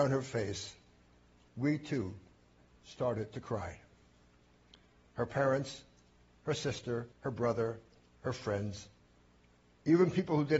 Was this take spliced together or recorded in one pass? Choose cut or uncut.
cut